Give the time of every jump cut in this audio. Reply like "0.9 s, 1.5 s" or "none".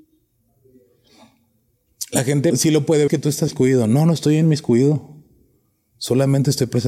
2.5 s, 3.1 s, 3.5 s